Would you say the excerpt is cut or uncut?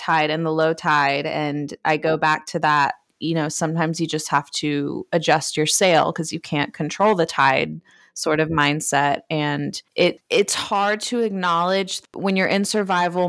uncut